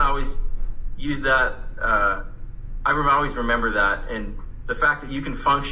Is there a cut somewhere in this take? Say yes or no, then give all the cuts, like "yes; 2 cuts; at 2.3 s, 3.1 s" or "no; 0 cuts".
no; 0 cuts